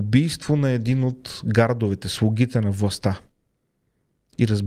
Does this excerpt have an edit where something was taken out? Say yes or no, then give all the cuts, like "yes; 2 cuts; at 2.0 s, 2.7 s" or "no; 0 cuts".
no; 0 cuts